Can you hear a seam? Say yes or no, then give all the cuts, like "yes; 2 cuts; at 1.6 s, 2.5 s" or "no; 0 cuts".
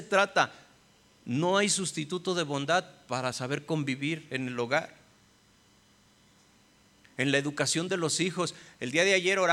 no; 0 cuts